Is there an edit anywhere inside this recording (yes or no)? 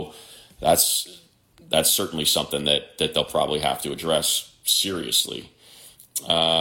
no